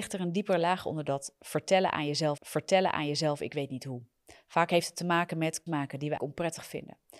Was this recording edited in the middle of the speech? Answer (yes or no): yes